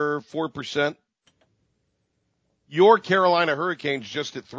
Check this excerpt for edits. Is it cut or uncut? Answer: uncut